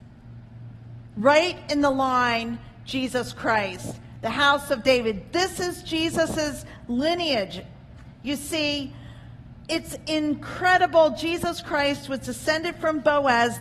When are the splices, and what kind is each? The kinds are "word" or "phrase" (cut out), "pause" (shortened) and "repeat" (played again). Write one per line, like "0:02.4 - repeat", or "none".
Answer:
none